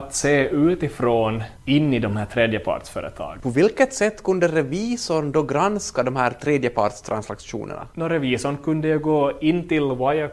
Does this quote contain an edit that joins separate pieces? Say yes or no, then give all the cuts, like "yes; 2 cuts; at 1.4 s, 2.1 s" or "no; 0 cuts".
no; 0 cuts